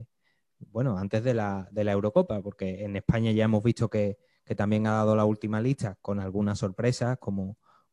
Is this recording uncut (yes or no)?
yes